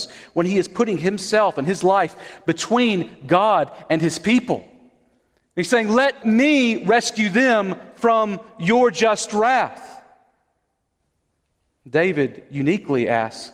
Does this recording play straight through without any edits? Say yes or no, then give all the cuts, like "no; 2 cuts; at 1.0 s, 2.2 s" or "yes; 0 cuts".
yes; 0 cuts